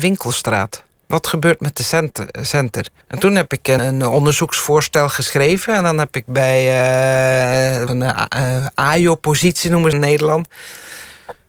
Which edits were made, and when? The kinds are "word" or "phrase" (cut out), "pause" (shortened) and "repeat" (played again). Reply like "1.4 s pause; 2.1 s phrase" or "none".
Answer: 3.0 s pause; 3.8 s word; 7.9 s word; 9.9 s phrase